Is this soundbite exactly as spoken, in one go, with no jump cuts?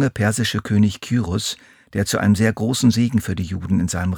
yes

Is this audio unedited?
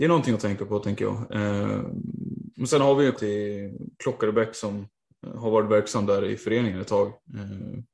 no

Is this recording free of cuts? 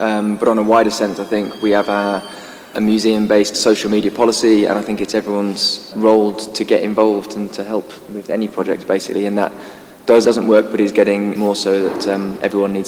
no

